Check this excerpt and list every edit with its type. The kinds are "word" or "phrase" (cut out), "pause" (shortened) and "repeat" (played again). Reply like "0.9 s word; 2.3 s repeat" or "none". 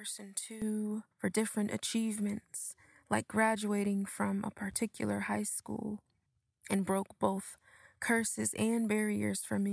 1.1 s pause